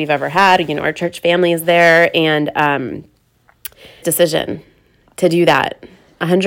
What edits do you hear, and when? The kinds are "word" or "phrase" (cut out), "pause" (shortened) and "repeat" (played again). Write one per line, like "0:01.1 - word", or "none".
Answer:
0:04.0 - phrase